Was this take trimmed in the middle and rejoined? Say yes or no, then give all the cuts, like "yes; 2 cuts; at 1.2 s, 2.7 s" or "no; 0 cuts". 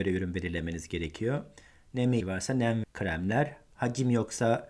yes; 2 cuts; at 2.2 s, 2.8 s